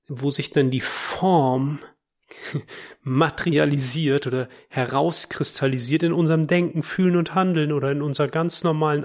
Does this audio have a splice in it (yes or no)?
no